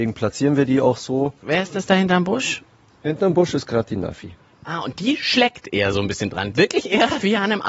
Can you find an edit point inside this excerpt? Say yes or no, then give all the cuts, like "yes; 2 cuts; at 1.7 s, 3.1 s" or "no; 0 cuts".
no; 0 cuts